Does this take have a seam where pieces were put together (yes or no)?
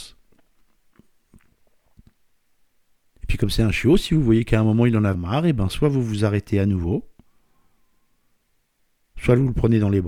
yes